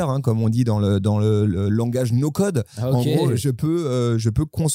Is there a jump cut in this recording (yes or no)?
no